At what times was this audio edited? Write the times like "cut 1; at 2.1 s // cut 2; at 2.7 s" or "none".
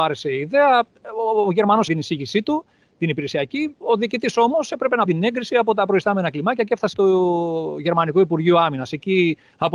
cut 1; at 1.9 s // cut 2; at 5.1 s // cut 3; at 6.9 s